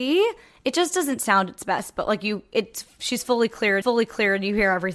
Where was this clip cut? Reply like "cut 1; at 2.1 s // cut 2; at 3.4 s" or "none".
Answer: cut 1; at 3.8 s